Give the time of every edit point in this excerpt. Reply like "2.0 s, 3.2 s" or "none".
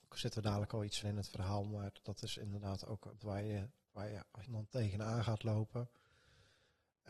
1.0 s, 3.2 s, 4.4 s